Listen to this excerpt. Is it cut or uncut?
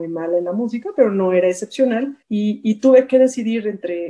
cut